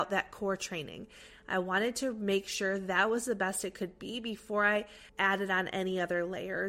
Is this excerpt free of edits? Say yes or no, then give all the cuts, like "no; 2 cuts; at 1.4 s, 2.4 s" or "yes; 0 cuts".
no; 1 cut; at 5.1 s